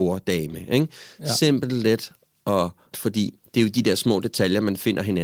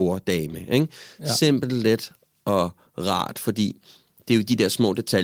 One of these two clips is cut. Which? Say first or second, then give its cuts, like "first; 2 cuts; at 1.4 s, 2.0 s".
first; 2 cuts; at 2.9 s, 3.4 s